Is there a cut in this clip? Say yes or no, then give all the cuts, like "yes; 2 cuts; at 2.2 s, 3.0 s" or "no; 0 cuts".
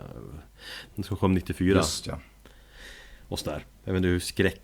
yes; 1 cut; at 0.9 s